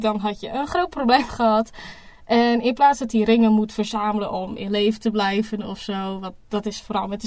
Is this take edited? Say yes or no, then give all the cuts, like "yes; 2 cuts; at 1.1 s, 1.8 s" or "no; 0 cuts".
no; 0 cuts